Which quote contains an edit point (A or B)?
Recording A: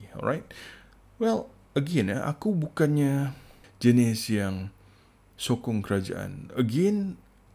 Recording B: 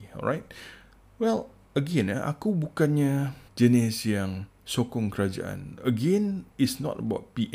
B